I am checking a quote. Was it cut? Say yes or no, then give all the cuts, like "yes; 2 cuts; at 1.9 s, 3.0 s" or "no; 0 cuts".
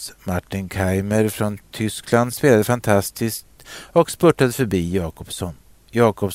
no; 0 cuts